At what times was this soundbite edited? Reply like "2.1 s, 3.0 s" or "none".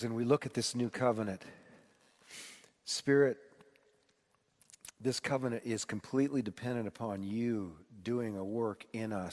none